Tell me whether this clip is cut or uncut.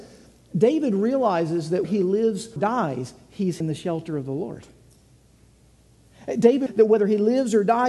cut